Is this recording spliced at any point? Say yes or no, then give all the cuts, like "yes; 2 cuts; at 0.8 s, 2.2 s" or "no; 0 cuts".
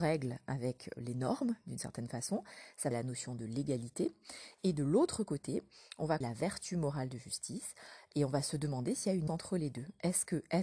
yes; 4 cuts; at 1.0 s, 2.9 s, 6.2 s, 9.3 s